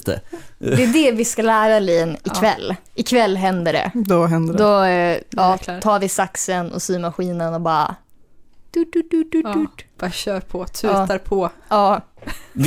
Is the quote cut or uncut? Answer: cut